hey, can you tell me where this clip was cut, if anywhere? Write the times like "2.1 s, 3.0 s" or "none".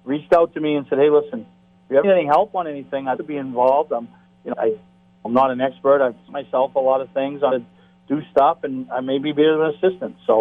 2.0 s, 3.2 s, 4.5 s, 5.2 s, 6.3 s, 7.5 s